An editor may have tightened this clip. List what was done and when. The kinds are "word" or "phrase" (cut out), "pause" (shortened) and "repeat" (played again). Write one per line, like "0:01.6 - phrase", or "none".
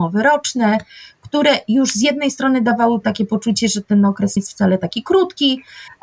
0:03.0 - word
0:04.4 - word